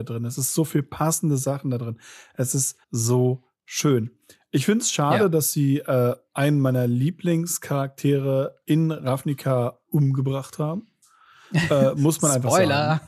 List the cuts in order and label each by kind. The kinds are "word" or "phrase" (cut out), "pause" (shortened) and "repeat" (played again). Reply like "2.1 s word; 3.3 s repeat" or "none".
2.8 s pause